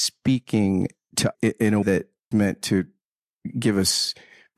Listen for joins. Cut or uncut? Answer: cut